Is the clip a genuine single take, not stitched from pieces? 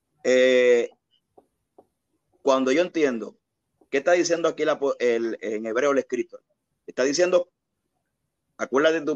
yes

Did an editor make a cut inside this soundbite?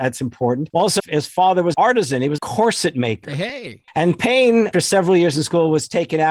yes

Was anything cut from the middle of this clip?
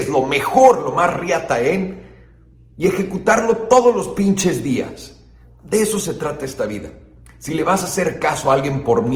no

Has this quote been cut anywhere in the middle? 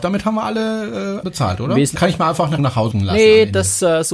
yes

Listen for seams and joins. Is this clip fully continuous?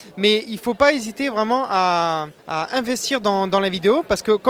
no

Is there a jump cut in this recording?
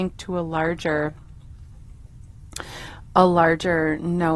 no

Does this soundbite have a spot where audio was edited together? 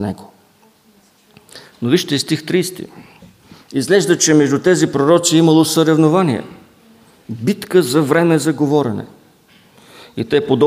no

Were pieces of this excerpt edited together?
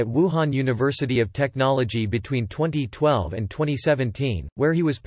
no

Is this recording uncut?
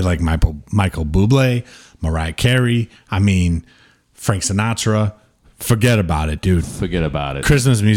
yes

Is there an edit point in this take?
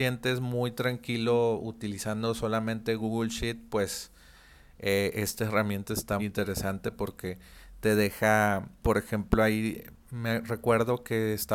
yes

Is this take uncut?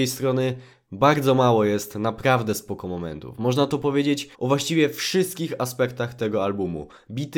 no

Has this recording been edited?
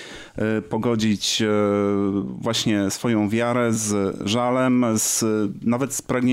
no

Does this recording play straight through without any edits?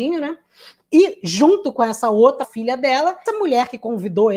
no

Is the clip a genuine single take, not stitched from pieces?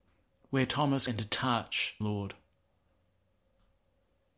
no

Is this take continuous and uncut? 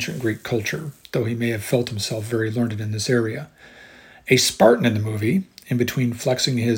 yes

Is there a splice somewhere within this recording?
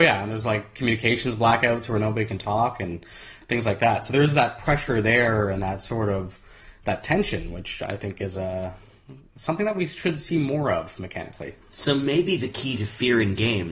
no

